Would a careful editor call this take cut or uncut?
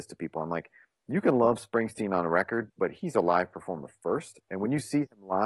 cut